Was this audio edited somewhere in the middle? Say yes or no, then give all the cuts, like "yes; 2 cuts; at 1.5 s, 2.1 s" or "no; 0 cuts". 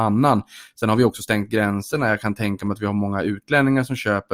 no; 0 cuts